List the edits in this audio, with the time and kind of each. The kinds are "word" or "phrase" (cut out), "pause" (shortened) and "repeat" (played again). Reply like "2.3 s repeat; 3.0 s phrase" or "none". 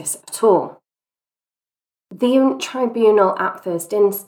2.6 s word